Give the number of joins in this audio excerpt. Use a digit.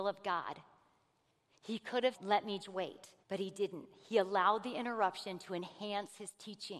3